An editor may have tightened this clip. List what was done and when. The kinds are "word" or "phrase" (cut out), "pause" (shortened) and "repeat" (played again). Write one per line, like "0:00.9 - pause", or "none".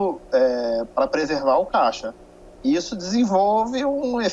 none